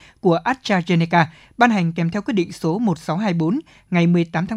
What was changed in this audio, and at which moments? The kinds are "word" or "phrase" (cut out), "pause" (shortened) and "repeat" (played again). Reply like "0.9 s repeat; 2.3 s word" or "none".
none